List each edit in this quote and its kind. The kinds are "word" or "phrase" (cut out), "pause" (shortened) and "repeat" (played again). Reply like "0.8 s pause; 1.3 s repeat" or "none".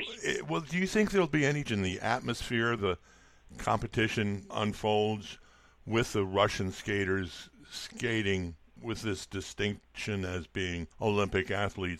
1.7 s word; 2.8 s word; 4.5 s word; 8.8 s word; 10.9 s pause